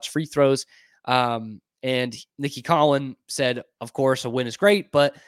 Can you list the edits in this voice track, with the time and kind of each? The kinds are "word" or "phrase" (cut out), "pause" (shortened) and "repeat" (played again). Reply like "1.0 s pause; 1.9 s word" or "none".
2.3 s pause